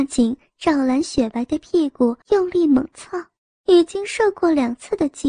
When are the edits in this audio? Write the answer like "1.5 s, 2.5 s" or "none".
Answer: 2.2 s, 3.4 s